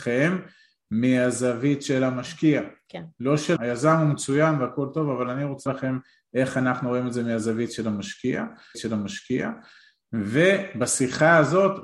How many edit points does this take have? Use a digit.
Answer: 3